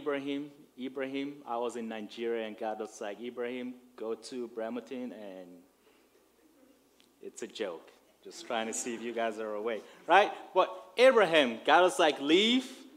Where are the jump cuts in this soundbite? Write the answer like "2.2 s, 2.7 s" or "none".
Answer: none